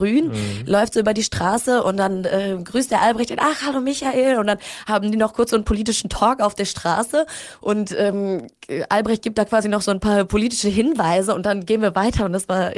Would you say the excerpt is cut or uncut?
uncut